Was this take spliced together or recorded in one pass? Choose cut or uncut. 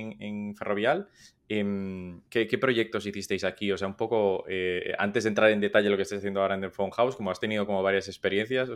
cut